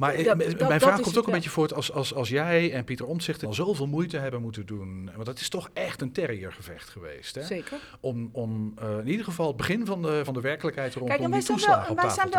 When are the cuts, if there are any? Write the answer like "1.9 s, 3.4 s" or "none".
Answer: 3.4 s, 10.3 s

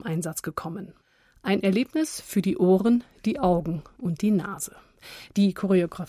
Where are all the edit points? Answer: none

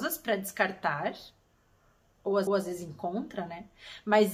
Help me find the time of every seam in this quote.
2.5 s

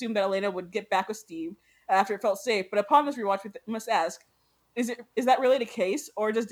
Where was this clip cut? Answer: none

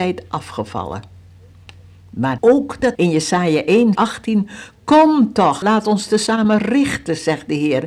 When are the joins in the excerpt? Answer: 2.4 s, 3.0 s, 3.9 s, 5.6 s

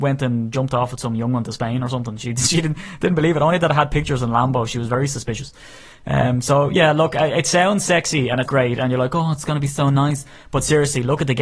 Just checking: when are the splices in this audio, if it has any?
8.5 s

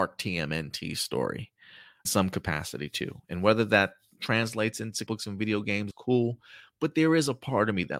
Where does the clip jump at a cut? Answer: 2.0 s, 5.1 s, 5.9 s

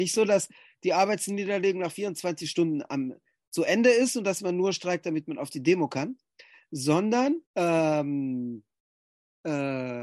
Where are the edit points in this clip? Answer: 7.5 s

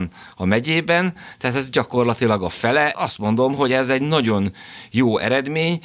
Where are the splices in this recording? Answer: 2.9 s

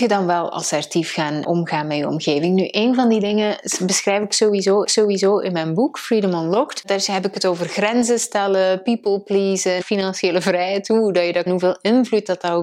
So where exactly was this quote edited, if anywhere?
1.4 s, 4.8 s, 9.8 s, 11.5 s

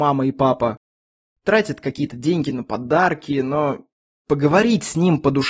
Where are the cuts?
none

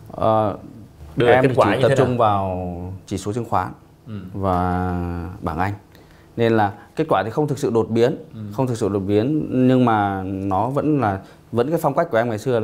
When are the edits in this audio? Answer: 8.3 s

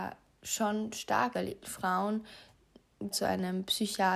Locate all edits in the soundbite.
1.3 s, 3.1 s

